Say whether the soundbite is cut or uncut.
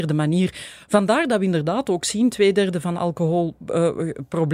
cut